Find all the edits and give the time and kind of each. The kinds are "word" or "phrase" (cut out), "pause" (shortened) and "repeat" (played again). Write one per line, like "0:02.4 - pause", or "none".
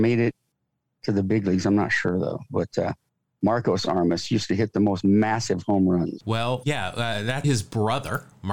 0:06.6 - word
0:07.4 - word